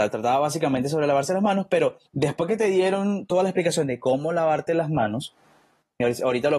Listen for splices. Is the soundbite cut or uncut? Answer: cut